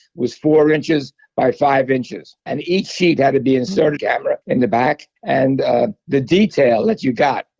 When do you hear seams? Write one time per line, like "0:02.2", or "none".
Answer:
0:02.4
0:04.0
0:04.4
0:05.2

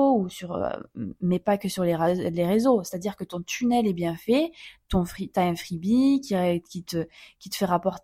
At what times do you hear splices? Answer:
none

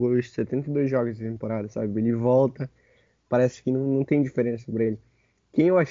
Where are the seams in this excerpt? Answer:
none

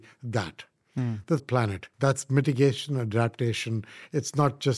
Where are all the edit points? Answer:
0:01.4
0:01.9

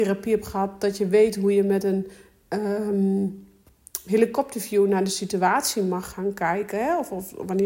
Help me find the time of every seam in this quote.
none

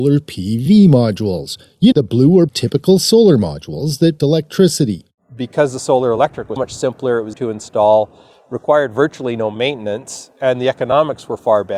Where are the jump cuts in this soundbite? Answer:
0:01.9
0:02.5
0:04.2
0:06.6
0:07.3

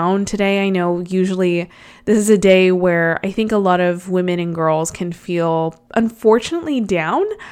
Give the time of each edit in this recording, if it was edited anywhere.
none

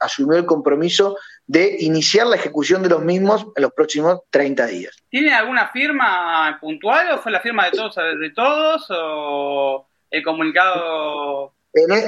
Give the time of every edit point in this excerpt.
0:04.3
0:05.0

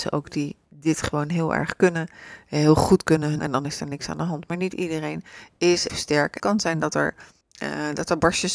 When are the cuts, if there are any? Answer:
0:03.4
0:05.9
0:06.4
0:07.4

